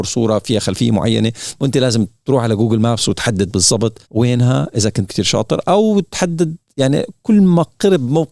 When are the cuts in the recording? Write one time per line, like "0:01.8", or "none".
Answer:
0:04.0
0:05.1